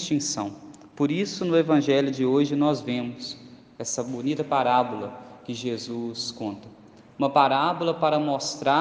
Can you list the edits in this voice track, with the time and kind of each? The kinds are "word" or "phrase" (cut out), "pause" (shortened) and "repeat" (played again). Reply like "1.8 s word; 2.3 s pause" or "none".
none